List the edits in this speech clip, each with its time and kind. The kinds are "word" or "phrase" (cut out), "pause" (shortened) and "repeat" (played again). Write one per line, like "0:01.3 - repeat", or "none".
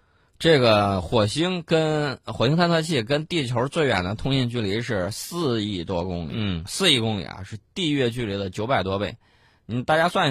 none